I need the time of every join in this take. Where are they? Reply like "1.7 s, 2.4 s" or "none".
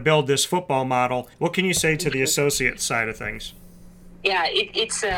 1.3 s